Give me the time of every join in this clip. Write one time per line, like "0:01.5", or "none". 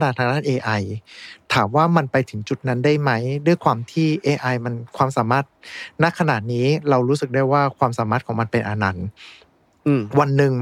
none